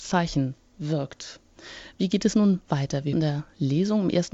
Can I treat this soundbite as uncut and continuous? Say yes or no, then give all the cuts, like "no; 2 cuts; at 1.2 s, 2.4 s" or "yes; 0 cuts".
no; 1 cut; at 3.1 s